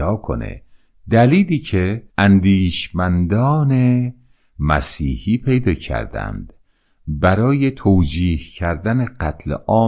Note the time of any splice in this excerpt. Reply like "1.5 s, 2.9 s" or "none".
2.1 s